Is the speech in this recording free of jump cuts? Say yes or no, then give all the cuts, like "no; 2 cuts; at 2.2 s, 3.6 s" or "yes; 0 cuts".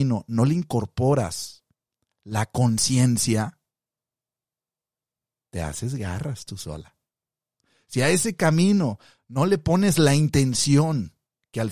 yes; 0 cuts